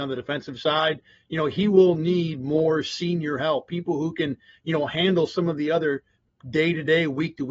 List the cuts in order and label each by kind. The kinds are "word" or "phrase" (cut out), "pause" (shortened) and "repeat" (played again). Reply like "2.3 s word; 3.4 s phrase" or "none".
none